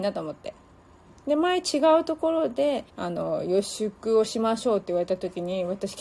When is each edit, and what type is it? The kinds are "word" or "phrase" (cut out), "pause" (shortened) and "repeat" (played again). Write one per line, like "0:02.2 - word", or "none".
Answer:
0:02.9 - pause